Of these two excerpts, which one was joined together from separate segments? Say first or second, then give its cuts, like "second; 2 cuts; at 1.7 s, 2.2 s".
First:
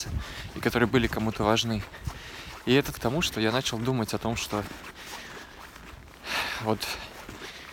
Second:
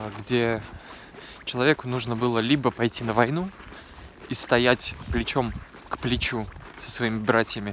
first; 1 cut; at 2.9 s